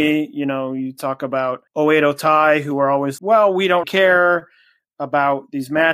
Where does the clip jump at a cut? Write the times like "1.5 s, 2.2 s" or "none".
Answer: 1.7 s, 3.2 s, 3.8 s